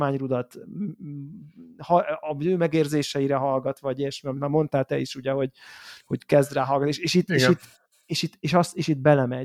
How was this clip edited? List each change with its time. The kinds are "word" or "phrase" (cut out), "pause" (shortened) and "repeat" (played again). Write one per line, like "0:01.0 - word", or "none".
none